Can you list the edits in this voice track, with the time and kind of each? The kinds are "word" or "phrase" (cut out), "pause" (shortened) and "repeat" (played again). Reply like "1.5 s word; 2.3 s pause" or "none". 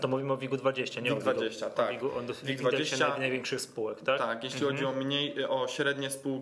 none